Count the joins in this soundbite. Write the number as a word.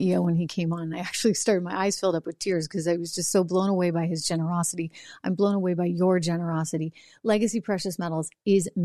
zero